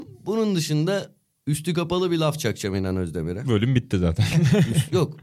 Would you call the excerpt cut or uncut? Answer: uncut